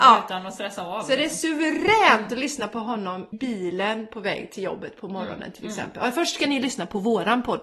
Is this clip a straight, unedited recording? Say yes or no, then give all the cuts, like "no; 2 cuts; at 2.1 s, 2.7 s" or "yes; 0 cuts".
no; 1 cut; at 3.3 s